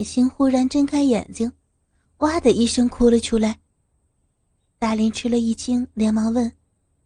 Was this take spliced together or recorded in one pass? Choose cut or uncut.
uncut